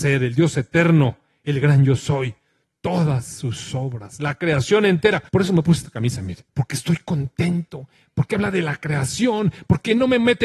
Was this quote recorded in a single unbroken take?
no; 2 cuts; at 5.3 s, 6.5 s

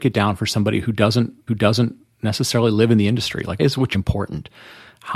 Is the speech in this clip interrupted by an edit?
yes; 3 cuts; at 1.5 s, 3.6 s, 3.9 s

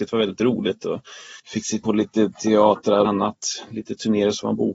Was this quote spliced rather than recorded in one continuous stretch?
yes; 3 cuts; at 1.4 s, 1.8 s, 3.0 s

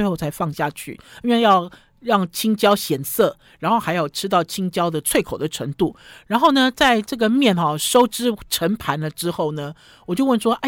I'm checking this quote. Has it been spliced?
no; 0 cuts

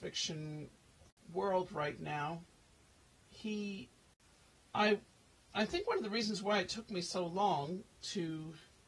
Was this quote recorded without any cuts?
yes; 0 cuts

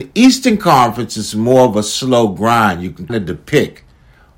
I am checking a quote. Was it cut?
yes; 1 cut; at 3.1 s

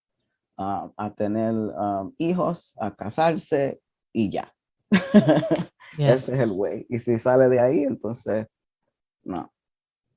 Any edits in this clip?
no; 0 cuts

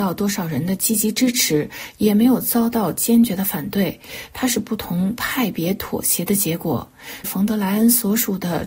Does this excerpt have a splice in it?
yes; 1 cut; at 7.2 s

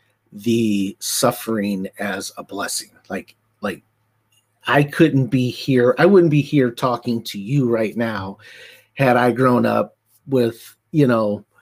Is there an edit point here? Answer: no; 0 cuts

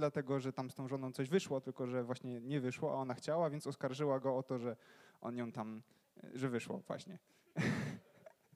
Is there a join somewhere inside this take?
no; 0 cuts

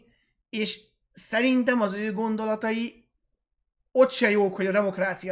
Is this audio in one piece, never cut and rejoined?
yes; 0 cuts

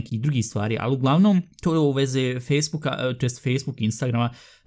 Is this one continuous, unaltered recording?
no; 1 cut; at 1.5 s

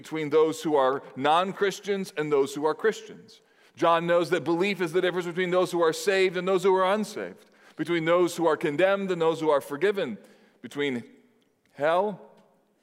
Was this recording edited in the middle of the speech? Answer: no; 0 cuts

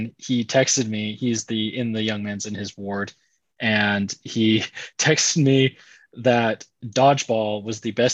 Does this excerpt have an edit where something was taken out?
no; 0 cuts

